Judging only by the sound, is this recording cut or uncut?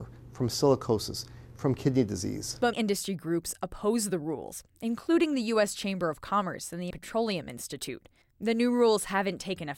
cut